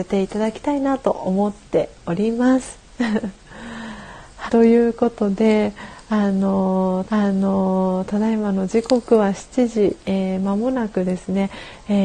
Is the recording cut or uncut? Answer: cut